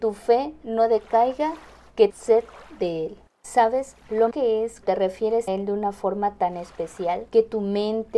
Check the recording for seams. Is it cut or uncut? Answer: cut